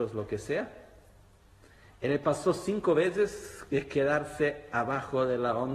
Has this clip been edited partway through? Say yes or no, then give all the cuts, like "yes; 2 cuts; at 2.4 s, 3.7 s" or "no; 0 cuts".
no; 0 cuts